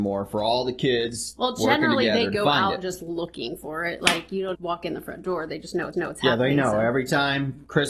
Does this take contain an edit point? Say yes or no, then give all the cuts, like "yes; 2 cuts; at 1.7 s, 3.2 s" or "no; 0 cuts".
yes; 2 cuts; at 4.5 s, 5.9 s